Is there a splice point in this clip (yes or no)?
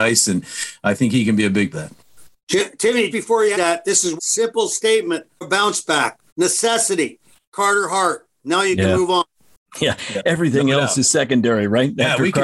yes